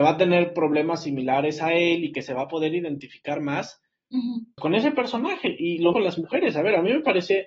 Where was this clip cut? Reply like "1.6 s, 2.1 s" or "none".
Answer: 4.6 s, 5.9 s